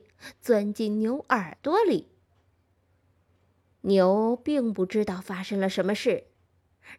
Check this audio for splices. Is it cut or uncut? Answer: uncut